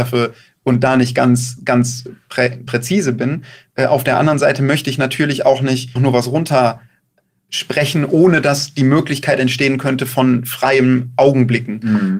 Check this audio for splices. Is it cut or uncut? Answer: cut